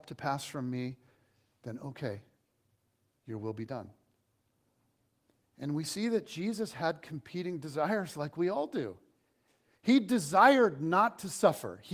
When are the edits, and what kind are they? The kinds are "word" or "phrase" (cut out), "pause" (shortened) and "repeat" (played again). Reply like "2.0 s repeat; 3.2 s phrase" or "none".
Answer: none